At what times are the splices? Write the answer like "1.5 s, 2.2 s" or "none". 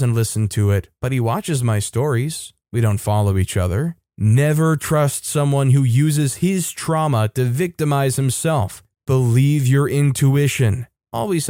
none